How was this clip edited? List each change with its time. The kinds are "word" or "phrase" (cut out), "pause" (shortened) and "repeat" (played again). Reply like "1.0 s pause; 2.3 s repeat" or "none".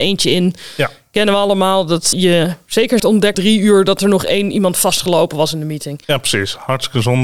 2.1 s word; 3.0 s phrase; 3.3 s word; 6.0 s pause